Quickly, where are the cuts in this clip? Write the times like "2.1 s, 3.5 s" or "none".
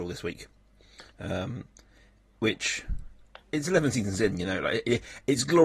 1.1 s, 3.4 s